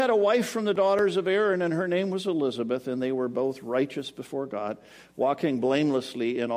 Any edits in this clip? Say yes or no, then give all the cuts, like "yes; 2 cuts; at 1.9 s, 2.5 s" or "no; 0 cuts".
no; 0 cuts